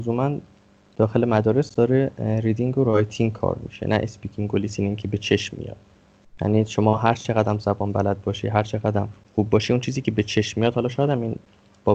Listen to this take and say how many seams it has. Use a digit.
1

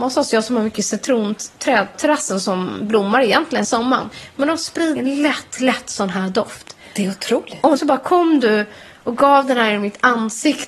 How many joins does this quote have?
4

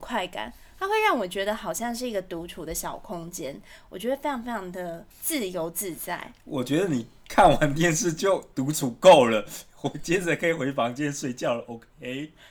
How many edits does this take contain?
1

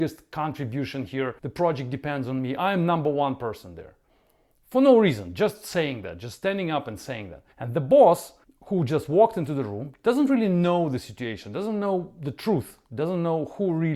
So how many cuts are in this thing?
3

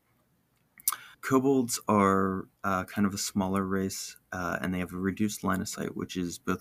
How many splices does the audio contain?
2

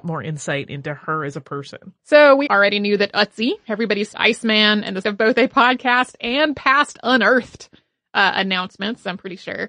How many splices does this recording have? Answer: 5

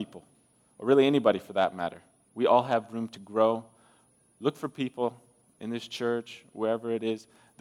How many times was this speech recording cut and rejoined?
0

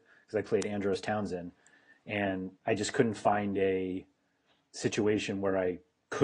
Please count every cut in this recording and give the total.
1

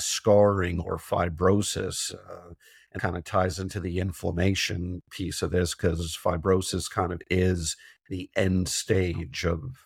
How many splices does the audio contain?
1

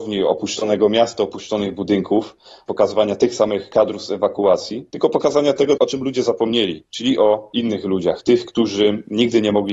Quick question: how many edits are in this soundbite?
0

